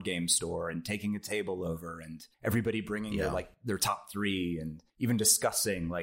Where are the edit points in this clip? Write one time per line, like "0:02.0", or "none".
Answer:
0:02.3
0:04.9